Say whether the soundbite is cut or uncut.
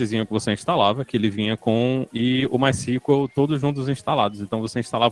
cut